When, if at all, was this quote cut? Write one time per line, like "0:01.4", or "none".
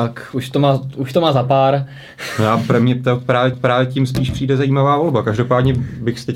0:03.5